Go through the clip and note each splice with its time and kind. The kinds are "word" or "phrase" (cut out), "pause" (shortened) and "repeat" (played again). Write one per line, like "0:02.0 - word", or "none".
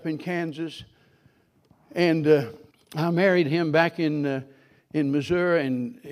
0:02.7 - pause